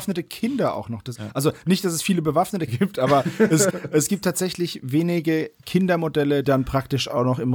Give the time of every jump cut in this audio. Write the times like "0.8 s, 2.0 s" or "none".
1.1 s, 2.7 s, 3.7 s, 6.4 s